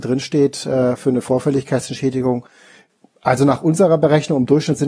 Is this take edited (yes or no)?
no